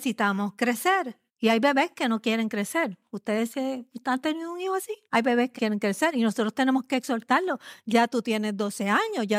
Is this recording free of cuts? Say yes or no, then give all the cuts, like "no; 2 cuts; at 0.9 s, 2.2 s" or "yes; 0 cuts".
no; 3 cuts; at 1.3 s, 5.1 s, 5.5 s